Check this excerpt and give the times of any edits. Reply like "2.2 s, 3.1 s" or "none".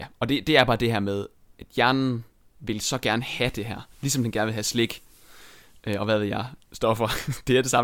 none